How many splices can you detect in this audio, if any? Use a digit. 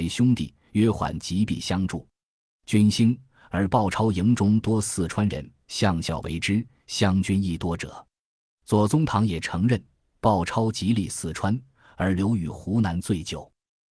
0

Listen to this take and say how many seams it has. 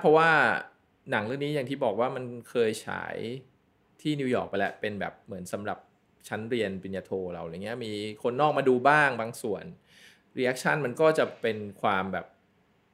0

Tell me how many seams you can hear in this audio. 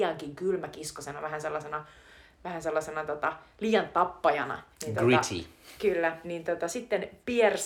2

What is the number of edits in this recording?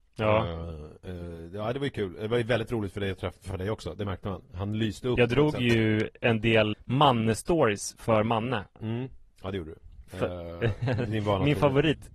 3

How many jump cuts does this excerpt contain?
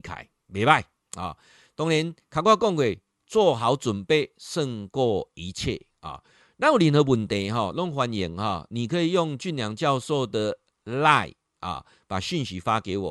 0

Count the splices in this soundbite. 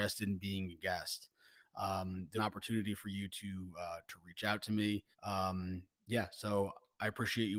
2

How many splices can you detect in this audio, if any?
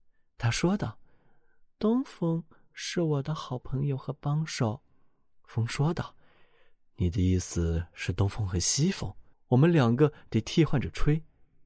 1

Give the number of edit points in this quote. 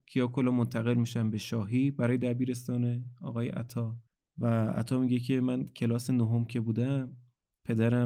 1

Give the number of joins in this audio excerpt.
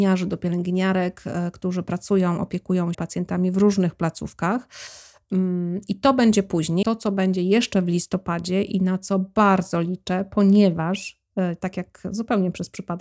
2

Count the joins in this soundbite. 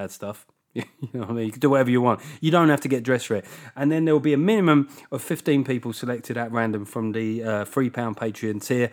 0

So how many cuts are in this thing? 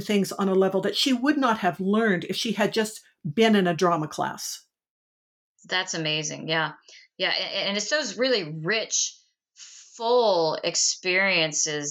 0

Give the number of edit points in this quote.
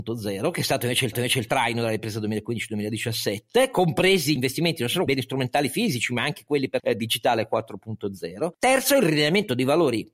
5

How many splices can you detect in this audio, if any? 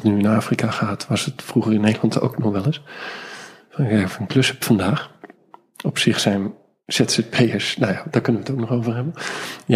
0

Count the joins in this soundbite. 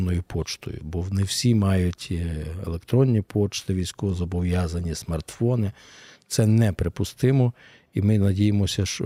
0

